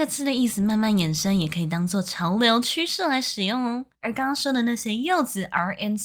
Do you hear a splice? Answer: yes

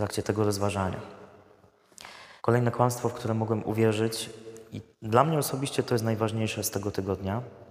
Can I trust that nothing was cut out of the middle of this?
no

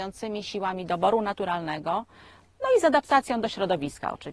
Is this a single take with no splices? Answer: yes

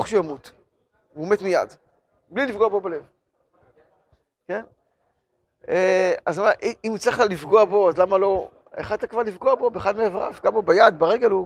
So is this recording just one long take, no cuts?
no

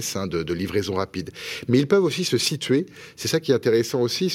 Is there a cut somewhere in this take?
no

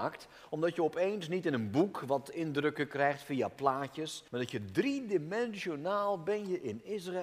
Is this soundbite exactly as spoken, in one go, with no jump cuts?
no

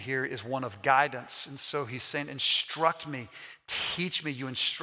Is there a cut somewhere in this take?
no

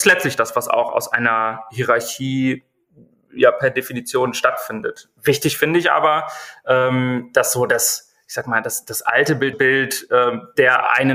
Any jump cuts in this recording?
yes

